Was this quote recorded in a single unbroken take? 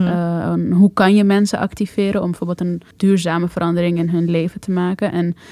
no; 1 cut; at 2.9 s

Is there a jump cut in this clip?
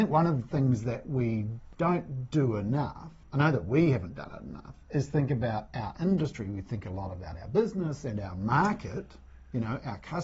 no; 0 cuts

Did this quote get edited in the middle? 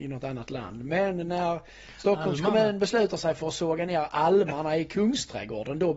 no; 0 cuts

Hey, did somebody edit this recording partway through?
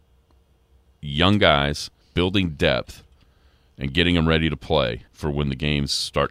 yes; 2 cuts; at 2.0 s, 5.1 s

